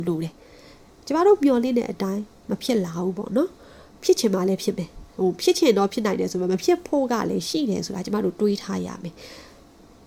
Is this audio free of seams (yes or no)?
yes